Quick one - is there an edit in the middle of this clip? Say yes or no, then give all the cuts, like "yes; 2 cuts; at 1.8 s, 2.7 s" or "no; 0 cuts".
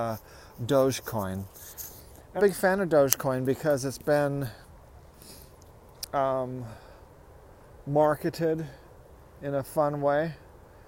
yes; 1 cut; at 2.4 s